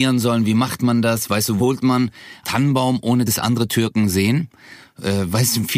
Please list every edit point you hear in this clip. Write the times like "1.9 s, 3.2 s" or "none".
1.6 s, 2.4 s, 3.3 s